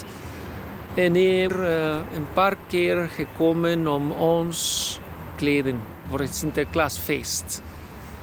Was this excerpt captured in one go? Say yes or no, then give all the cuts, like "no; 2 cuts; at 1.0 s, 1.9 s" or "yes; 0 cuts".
no; 2 cuts; at 1.5 s, 5.3 s